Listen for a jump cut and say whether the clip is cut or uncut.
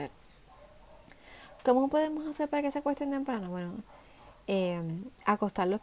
uncut